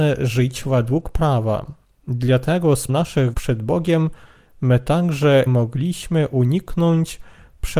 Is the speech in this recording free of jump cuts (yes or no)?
no